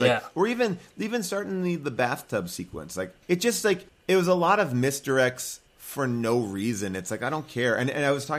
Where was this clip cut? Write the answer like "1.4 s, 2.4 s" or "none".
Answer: 3.2 s, 3.9 s, 5.7 s